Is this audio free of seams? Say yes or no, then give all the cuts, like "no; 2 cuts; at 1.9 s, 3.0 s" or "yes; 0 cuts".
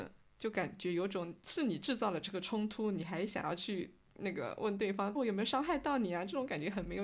no; 1 cut; at 5.2 s